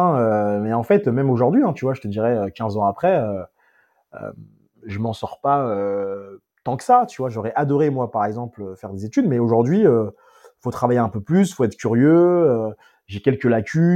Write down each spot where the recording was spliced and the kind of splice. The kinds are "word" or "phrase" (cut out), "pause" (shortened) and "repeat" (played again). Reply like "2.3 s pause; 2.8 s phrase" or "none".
none

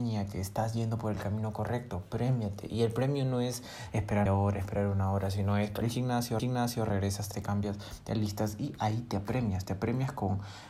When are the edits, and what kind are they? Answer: 4.3 s word; 5.8 s phrase; 6.4 s repeat; 7.3 s word

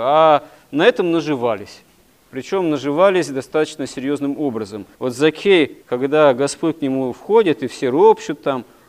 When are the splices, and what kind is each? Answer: 4.9 s pause; 5.8 s pause

